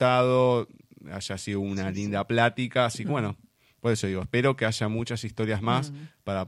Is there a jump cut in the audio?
no; 0 cuts

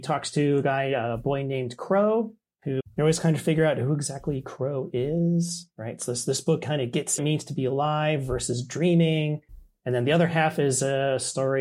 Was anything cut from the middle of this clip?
yes; 2 cuts; at 2.8 s, 7.2 s

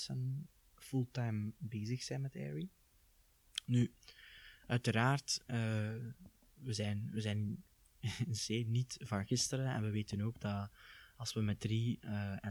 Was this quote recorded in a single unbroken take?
yes; 0 cuts

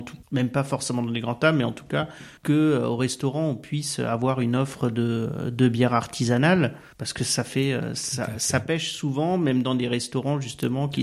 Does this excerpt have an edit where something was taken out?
no; 0 cuts

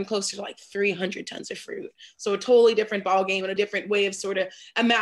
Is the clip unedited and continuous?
no; 1 cut; at 3.6 s

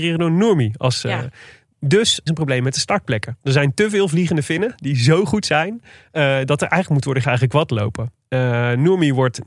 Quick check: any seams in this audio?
yes; 2 cuts; at 2.3 s, 7.2 s

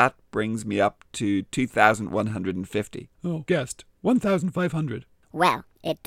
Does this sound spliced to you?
yes; 1 cut; at 3.5 s

